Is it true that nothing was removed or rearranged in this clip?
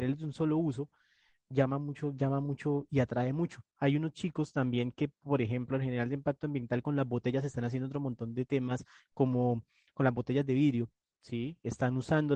yes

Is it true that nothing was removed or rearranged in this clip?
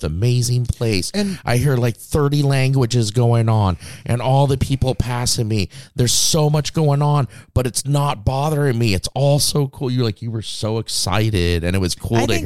yes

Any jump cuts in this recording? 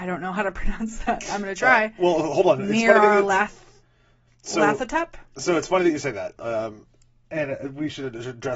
no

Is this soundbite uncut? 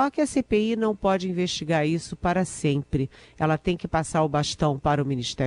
yes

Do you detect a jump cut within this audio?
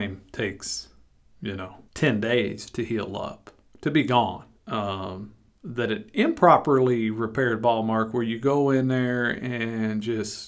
yes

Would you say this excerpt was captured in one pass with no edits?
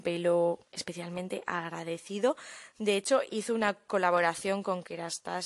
yes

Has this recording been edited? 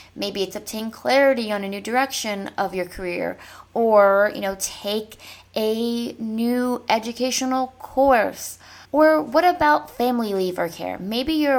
yes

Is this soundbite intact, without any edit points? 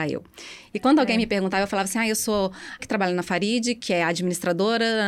no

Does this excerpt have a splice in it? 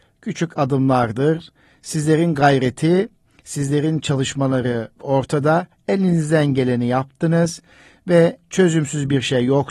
no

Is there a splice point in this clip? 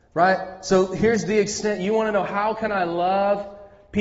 no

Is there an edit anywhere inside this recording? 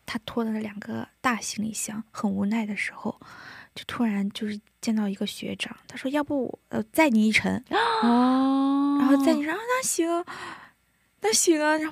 no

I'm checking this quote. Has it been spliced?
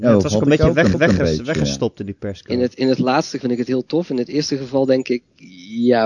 yes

